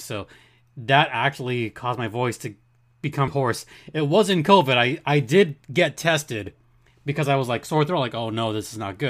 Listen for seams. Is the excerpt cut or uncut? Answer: cut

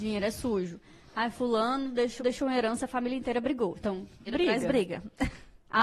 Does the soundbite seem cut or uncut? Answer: cut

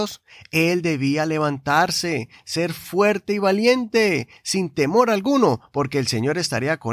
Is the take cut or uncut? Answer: uncut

